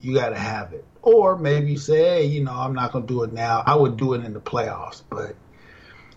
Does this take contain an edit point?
no; 0 cuts

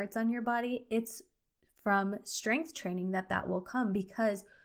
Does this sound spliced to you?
no; 0 cuts

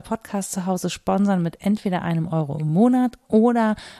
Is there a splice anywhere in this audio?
no; 0 cuts

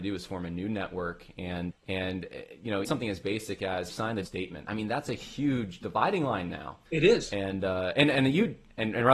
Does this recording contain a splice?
yes; 5 cuts; at 1.7 s, 2.8 s, 3.9 s, 4.2 s, 6.9 s

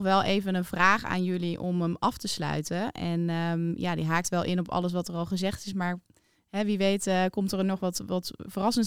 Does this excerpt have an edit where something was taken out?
no; 0 cuts

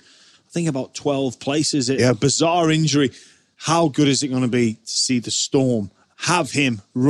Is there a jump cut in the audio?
no; 0 cuts

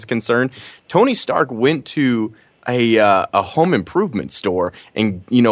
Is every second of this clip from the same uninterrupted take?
yes; 0 cuts

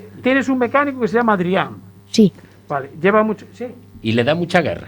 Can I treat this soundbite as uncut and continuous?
no; 1 cut; at 2.0 s

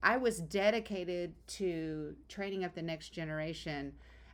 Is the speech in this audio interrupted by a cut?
no; 0 cuts

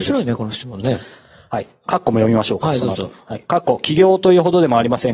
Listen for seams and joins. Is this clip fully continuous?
yes; 0 cuts

